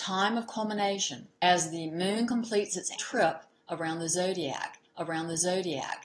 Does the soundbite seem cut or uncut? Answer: cut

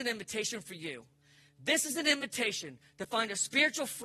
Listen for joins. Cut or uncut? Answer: uncut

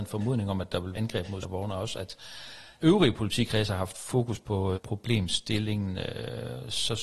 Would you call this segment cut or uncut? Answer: cut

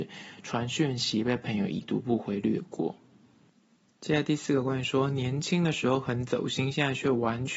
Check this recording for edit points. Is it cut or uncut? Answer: uncut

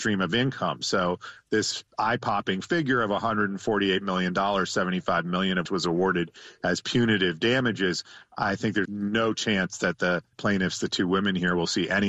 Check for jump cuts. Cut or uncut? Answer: cut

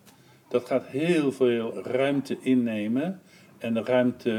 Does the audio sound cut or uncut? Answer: cut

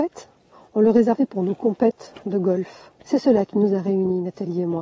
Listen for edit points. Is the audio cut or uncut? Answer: cut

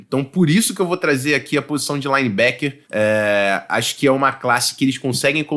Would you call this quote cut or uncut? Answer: cut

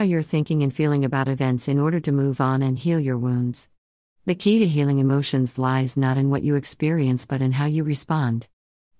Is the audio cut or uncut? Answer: uncut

